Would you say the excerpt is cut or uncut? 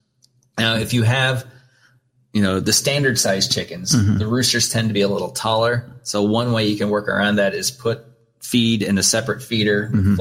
uncut